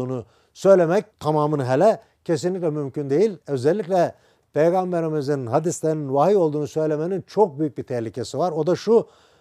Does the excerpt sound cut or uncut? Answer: cut